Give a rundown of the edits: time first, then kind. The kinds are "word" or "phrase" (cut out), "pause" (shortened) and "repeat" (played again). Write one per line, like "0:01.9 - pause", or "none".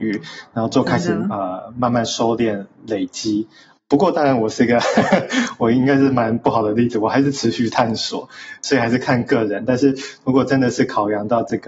none